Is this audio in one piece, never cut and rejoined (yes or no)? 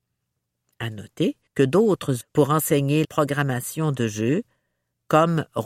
no